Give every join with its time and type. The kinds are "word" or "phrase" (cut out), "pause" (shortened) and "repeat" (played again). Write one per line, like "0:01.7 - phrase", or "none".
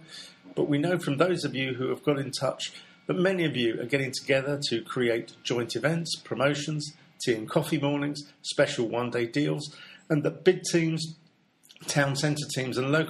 none